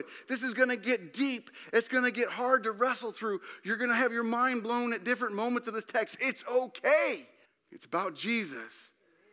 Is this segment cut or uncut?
cut